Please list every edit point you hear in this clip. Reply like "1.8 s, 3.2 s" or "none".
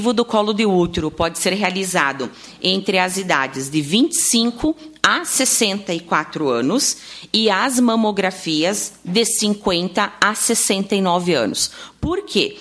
none